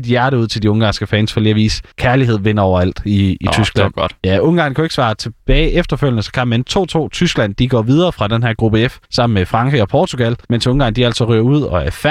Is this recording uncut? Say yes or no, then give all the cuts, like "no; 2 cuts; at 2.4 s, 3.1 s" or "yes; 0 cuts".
no; 4 cuts; at 1.9 s, 4.2 s, 9.0 s, 10.4 s